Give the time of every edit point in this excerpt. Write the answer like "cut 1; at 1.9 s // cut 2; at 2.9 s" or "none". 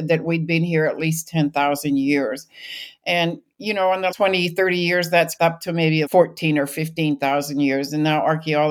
cut 1; at 4.1 s // cut 2; at 5.4 s // cut 3; at 6.1 s